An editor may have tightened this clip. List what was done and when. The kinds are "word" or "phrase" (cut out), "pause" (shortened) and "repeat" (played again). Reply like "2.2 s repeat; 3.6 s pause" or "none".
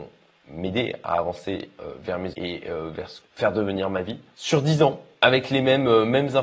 2.3 s word; 3.2 s phrase